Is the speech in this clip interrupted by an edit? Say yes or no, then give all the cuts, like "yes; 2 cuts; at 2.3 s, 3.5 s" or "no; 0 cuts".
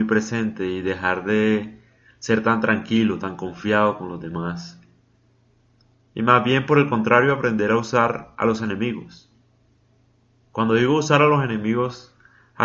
no; 0 cuts